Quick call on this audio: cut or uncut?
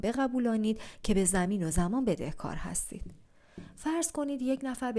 uncut